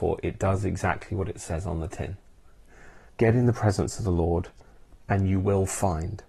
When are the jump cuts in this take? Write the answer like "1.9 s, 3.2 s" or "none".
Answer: 3.1 s